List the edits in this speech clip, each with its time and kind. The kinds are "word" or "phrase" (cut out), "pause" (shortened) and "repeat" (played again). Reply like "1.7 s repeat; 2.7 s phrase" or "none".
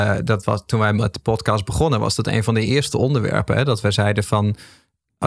none